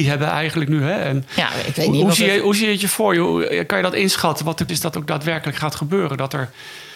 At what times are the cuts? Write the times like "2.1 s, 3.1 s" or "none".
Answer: 4.7 s